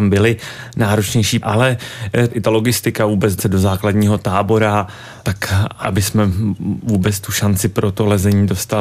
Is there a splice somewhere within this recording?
yes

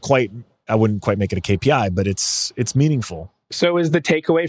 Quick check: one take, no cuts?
yes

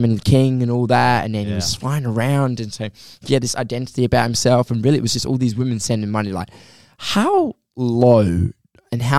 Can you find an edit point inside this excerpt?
no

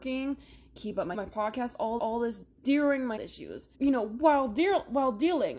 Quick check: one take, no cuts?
no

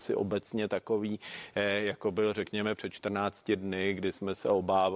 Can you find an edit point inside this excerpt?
no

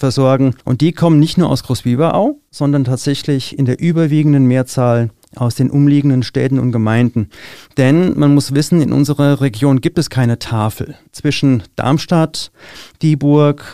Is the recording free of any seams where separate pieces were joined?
yes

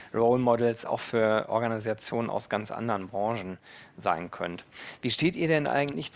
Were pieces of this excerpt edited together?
no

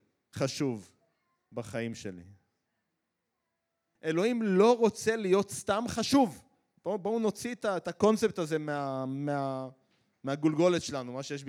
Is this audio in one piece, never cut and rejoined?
yes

